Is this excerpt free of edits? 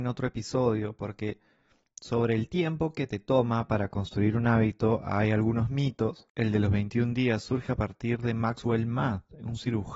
yes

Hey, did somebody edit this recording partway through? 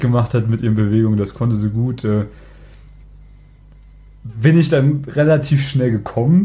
no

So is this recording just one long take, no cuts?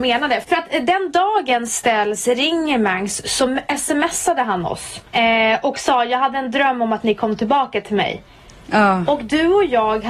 no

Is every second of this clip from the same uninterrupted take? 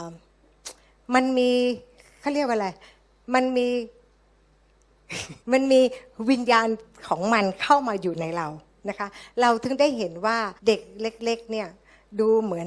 no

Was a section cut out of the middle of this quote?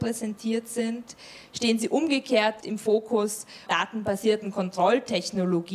yes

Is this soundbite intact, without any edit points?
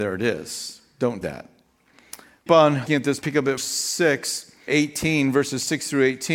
no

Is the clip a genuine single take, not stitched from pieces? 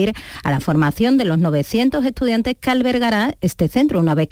yes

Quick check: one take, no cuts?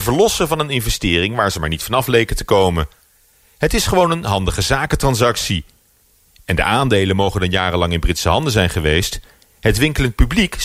yes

